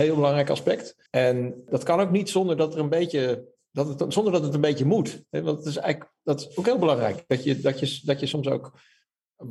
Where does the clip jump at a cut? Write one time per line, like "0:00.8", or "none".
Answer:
0:01.1